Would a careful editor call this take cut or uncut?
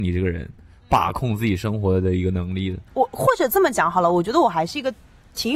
cut